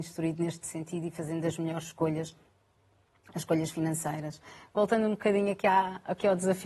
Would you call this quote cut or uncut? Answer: uncut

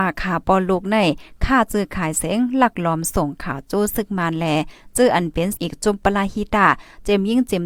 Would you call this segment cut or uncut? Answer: cut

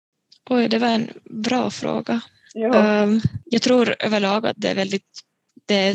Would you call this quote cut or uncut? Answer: uncut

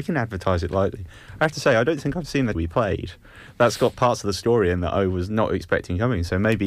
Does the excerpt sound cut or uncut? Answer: cut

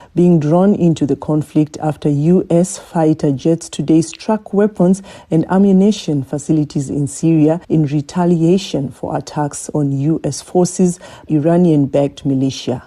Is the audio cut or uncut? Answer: cut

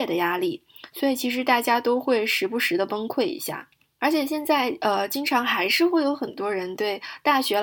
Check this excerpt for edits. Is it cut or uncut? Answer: uncut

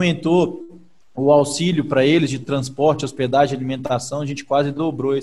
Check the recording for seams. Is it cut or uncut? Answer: uncut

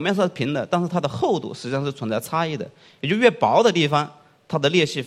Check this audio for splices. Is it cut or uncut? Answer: uncut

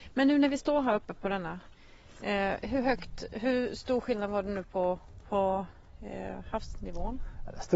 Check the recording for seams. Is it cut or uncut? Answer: uncut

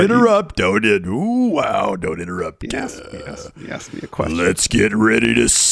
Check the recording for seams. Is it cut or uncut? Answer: uncut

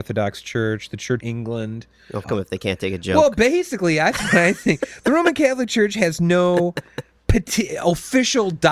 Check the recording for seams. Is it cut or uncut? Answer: cut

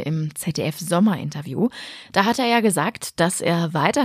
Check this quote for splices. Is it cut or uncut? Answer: uncut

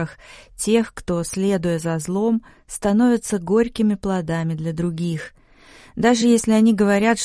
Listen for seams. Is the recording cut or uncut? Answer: uncut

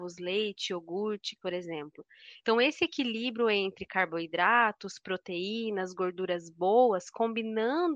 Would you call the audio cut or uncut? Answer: cut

